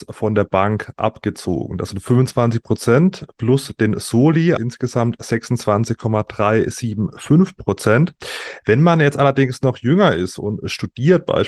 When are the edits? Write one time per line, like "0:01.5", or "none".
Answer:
0:04.6